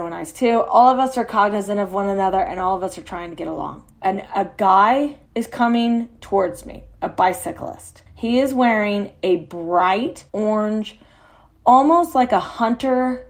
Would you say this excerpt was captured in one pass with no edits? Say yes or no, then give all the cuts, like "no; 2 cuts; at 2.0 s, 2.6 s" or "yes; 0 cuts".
no; 4 cuts; at 3.9 s, 5.3 s, 8.1 s, 10.3 s